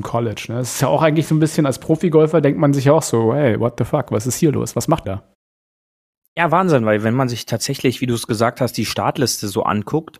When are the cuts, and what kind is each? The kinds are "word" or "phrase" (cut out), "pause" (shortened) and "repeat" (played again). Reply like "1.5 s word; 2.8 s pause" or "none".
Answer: 5.0 s phrase